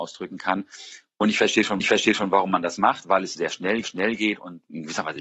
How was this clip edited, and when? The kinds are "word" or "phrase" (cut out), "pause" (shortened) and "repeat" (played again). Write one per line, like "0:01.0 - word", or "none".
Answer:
0:01.8 - repeat
0:03.4 - word
0:03.8 - repeat